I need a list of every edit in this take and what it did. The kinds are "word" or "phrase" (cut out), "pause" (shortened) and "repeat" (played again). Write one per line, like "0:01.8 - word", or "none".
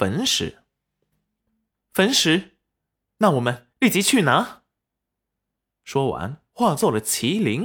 0:03.7 - pause